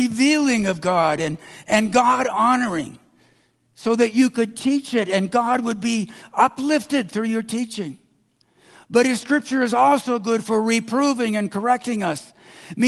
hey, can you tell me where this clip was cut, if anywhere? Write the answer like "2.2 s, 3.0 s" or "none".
none